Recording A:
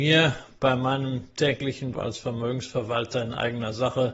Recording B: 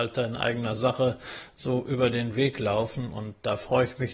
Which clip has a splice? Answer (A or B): A